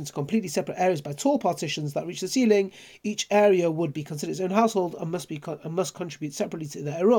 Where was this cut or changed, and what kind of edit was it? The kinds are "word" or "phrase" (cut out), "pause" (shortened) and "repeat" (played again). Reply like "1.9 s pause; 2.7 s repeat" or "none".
none